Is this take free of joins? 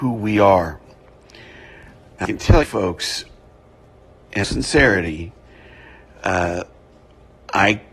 no; 3 cuts; at 2.2 s, 2.6 s, 4.4 s

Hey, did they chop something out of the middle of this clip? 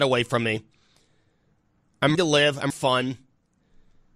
yes; 2 cuts; at 2.1 s, 2.7 s

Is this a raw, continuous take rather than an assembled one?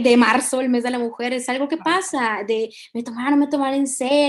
yes; 0 cuts

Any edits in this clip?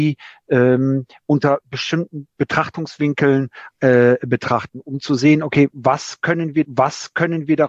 yes; 2 cuts; at 3.7 s, 6.6 s

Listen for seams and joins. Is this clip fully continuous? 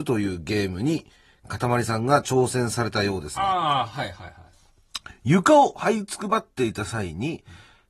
yes; 0 cuts

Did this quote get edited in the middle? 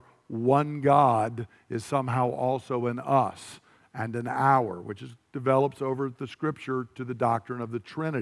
no; 0 cuts

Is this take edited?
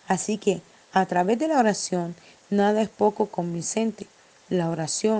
no; 0 cuts

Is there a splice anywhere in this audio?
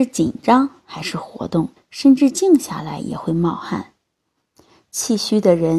yes; 1 cut; at 1.8 s

